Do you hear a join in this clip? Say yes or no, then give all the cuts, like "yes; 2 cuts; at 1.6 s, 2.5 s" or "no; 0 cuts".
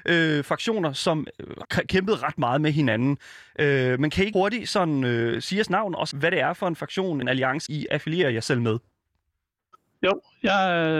yes; 5 cuts; at 1.6 s, 4.3 s, 6.1 s, 7.2 s, 7.7 s